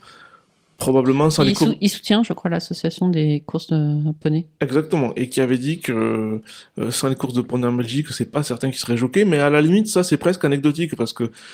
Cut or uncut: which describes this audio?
uncut